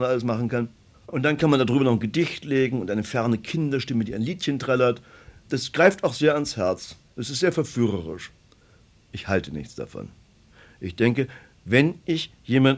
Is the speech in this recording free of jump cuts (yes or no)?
yes